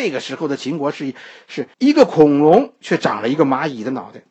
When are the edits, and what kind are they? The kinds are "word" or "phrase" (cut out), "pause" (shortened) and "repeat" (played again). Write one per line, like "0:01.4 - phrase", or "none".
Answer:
0:01.7 - pause